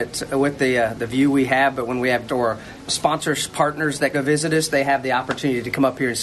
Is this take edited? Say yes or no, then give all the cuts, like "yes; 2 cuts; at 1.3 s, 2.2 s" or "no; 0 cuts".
yes; 3 cuts; at 2.3 s, 2.9 s, 4.1 s